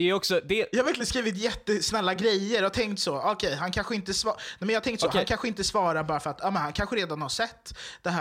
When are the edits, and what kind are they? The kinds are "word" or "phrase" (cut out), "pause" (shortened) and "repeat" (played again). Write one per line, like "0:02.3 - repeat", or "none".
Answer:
none